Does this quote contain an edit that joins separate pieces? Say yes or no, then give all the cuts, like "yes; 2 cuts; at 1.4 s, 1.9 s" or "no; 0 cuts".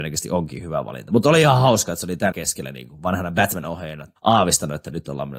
yes; 2 cuts; at 2.3 s, 4.2 s